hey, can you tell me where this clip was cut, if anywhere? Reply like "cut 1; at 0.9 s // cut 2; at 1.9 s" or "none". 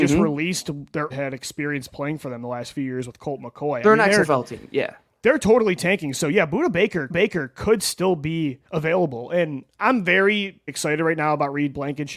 cut 1; at 1.1 s // cut 2; at 7.1 s // cut 3; at 8.7 s // cut 4; at 10.7 s